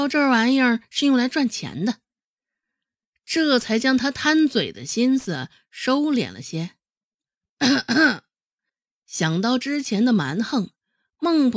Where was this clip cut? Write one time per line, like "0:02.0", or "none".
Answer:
none